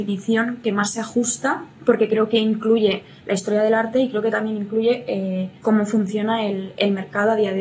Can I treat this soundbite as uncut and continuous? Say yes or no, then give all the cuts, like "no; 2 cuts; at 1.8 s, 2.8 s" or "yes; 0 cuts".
no; 2 cuts; at 1.7 s, 5.6 s